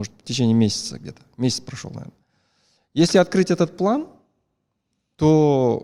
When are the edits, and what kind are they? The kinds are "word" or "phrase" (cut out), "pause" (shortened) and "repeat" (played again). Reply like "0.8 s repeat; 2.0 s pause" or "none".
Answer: none